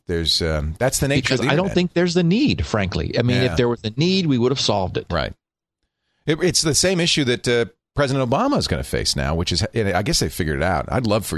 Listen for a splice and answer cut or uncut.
uncut